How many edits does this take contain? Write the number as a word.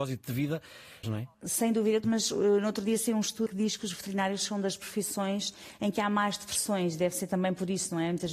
four